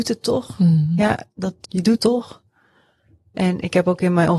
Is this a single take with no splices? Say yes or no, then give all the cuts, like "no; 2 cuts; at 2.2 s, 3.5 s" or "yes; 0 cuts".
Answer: no; 2 cuts; at 1.6 s, 2.0 s